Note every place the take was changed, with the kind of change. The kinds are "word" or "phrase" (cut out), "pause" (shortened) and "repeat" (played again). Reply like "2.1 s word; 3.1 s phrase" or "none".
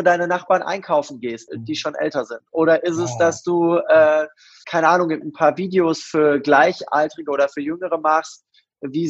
1.5 s word; 4.6 s word; 5.2 s word